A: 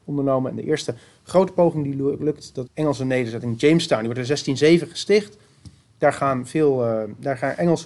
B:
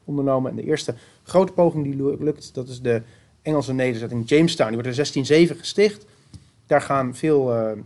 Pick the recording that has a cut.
A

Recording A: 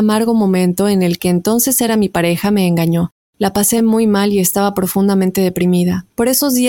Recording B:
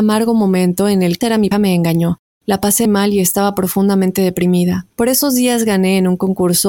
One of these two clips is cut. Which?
B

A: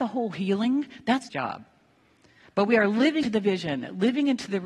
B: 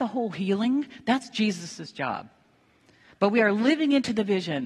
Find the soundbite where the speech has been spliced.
A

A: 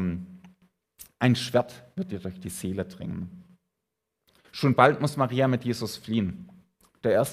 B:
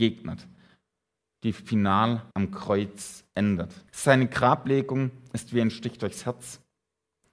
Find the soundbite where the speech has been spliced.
B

